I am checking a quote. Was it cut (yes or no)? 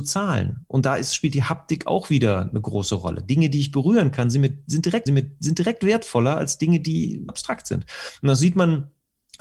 yes